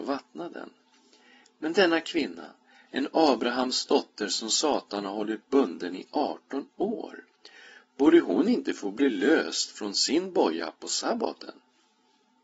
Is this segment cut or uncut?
uncut